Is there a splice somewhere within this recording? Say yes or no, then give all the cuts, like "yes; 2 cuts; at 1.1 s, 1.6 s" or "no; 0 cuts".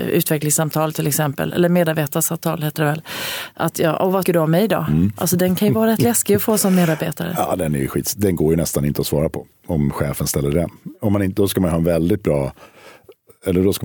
yes; 1 cut; at 4.2 s